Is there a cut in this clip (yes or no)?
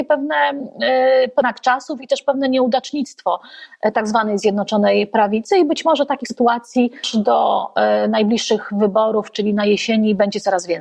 no